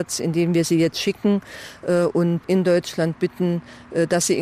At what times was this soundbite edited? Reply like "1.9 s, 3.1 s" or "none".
2.4 s

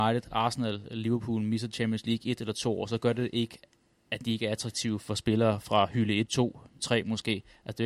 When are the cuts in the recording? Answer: 6.3 s, 6.8 s

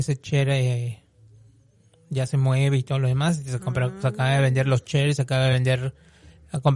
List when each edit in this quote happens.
none

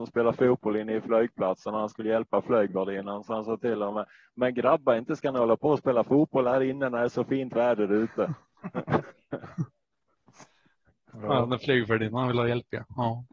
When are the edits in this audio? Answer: none

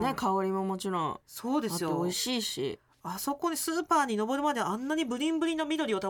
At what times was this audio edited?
1.2 s

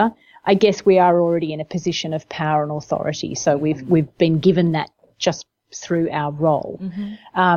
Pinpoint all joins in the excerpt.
none

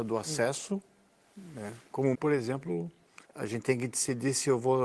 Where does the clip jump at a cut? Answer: 2.1 s, 3.2 s

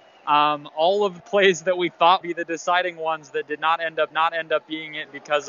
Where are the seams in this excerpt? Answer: 1.2 s, 2.2 s, 4.1 s

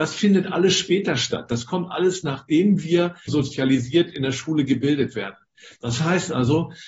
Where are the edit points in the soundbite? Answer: 3.3 s

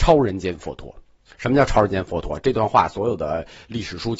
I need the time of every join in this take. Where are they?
1.3 s

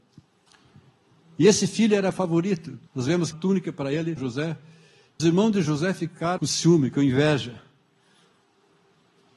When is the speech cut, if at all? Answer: 2.9 s, 3.3 s, 4.2 s, 5.2 s, 6.4 s

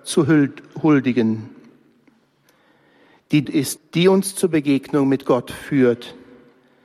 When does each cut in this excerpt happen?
3.4 s, 3.8 s

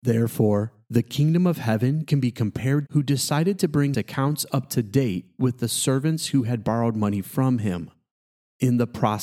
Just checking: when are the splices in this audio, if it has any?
2.9 s, 3.9 s

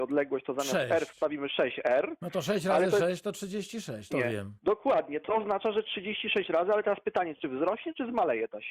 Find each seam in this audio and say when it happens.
4.1 s

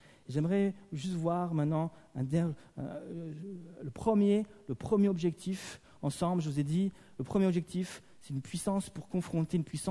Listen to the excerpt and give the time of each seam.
none

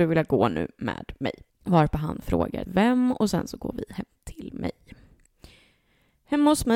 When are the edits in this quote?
1.5 s, 2.7 s

